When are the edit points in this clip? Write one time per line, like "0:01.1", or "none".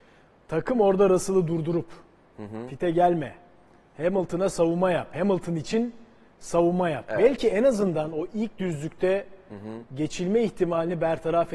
none